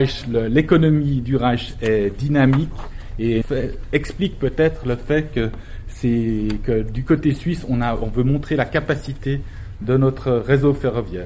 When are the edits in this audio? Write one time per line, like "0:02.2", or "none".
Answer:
0:03.4